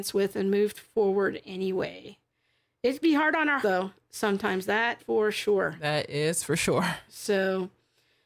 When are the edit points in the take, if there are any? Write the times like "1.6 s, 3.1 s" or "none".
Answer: 3.0 s, 3.6 s, 5.0 s